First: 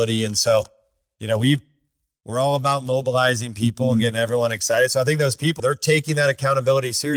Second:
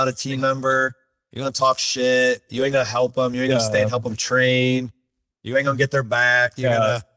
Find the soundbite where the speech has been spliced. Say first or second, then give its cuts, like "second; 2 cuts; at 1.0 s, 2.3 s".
first; 1 cut; at 5.6 s